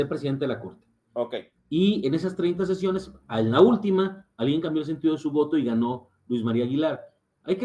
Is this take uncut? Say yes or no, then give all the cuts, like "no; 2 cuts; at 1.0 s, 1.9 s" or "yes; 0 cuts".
yes; 0 cuts